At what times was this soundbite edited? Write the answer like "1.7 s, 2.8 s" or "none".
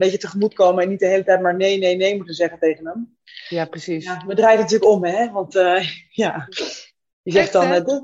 none

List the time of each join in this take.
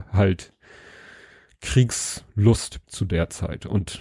2.8 s

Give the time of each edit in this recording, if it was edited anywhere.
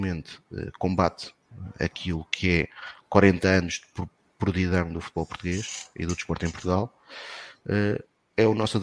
none

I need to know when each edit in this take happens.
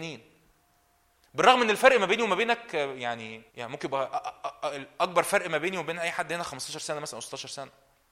3.5 s

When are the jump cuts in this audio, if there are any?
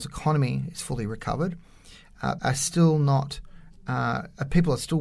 2.4 s

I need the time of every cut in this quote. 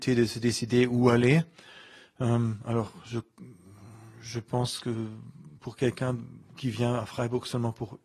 none

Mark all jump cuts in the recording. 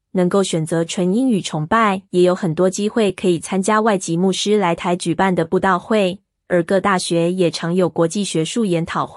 2.1 s

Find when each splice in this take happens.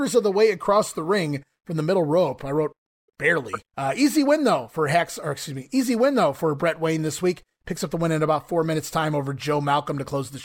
3.7 s

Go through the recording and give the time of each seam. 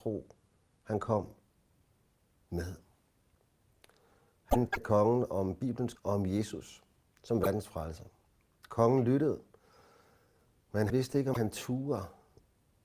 4.7 s, 5.9 s, 10.9 s

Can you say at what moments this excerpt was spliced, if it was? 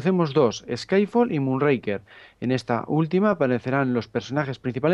none

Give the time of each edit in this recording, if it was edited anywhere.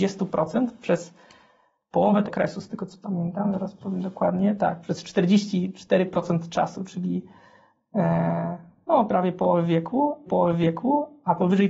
2.2 s, 9.1 s, 10.3 s

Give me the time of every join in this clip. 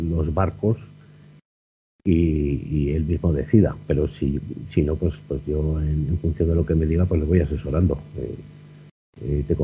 none

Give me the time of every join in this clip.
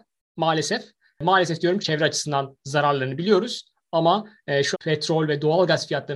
1.8 s, 4.7 s

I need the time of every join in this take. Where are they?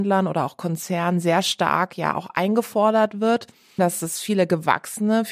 3.8 s

